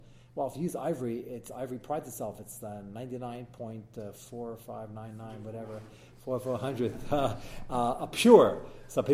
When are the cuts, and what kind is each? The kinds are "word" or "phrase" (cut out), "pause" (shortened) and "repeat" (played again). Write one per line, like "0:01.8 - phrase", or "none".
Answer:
none